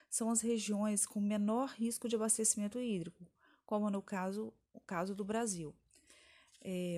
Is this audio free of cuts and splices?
yes; 0 cuts

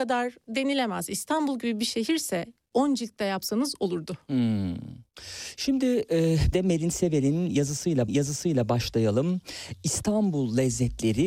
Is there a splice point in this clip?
yes; 3 cuts; at 2.7 s, 6.5 s, 8.1 s

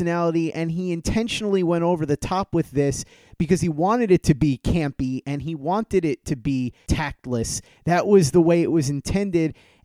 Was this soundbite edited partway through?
no; 0 cuts

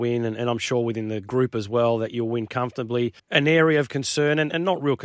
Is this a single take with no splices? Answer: no; 1 cut; at 3.2 s

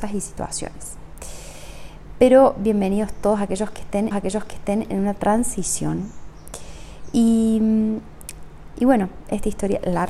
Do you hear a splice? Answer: yes; 1 cut; at 4.1 s

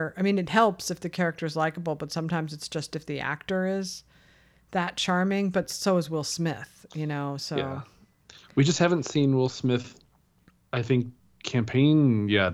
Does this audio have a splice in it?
no; 0 cuts

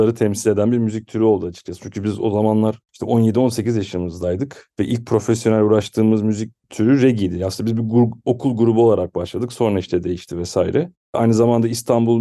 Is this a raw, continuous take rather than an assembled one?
yes; 0 cuts

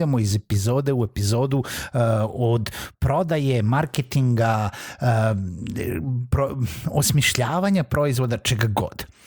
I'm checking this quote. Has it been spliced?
no; 0 cuts

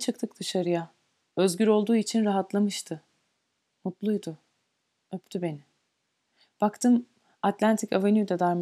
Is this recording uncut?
yes; 0 cuts

